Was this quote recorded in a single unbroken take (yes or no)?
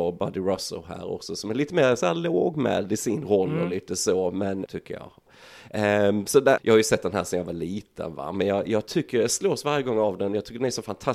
no